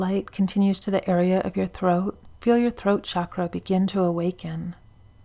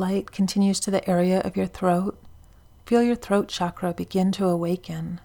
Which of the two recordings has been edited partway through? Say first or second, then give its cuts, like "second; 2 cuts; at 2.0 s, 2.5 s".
first; 1 cut; at 2.4 s